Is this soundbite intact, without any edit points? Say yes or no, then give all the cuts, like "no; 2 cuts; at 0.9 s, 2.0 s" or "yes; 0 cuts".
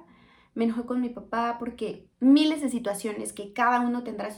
no; 1 cut; at 2.1 s